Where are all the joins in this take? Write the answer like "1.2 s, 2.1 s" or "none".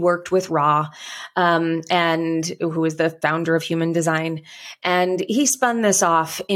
5.3 s